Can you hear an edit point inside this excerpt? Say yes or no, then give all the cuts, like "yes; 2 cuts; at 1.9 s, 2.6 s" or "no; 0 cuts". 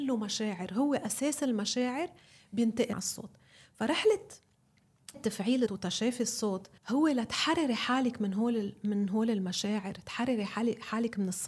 yes; 4 cuts; at 2.9 s, 5.1 s, 5.7 s, 6.8 s